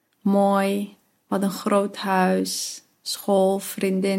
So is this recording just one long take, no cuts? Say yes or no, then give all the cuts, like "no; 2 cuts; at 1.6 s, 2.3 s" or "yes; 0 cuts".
yes; 0 cuts